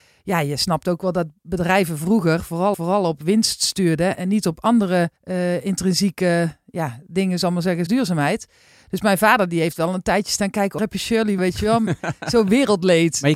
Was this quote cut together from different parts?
yes; 6 cuts; at 2.7 s, 4.1 s, 5.2 s, 7.9 s, 10.8 s, 11.4 s

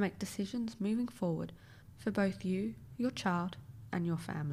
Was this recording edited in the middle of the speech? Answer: no; 0 cuts

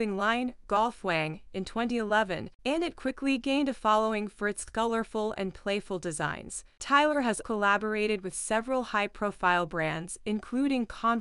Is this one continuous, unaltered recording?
no; 2 cuts; at 2.6 s, 7.4 s

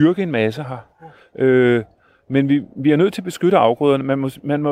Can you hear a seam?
no; 0 cuts

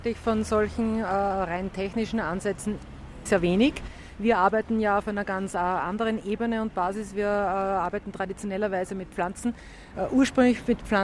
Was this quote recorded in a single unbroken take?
no; 1 cut; at 3.3 s

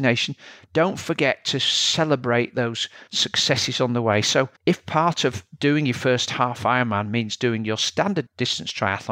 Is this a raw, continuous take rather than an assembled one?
no; 2 cuts; at 3.1 s, 4.6 s

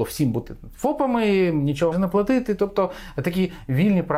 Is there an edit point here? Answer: yes; 1 cut; at 1.9 s

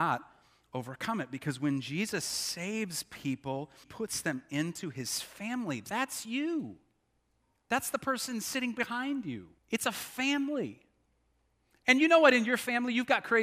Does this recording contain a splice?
yes; 3 cuts; at 3.8 s, 7.4 s, 9.6 s

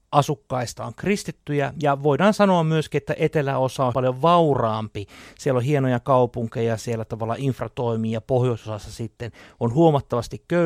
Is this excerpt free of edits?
no; 1 cut; at 3.9 s

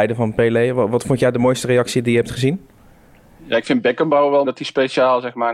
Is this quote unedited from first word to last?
no; 1 cut; at 4.4 s

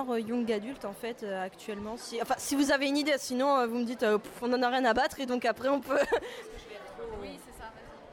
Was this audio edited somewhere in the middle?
no; 0 cuts

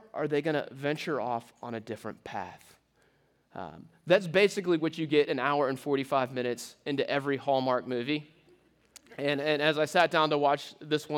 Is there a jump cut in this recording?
no; 0 cuts

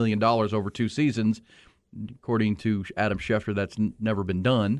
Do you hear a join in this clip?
no; 0 cuts

